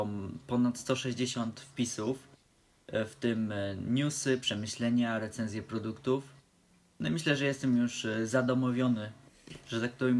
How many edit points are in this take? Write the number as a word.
zero